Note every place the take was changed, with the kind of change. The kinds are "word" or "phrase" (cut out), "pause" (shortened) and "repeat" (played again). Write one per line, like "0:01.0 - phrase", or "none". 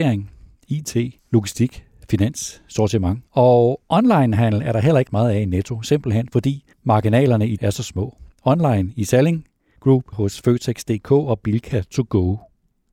0:01.2 - pause
0:03.3 - pause
0:05.1 - word
0:06.7 - pause
0:07.6 - word
0:10.1 - word